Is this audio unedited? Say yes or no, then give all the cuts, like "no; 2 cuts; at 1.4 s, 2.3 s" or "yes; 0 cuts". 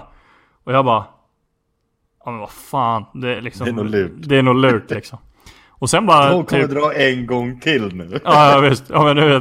yes; 0 cuts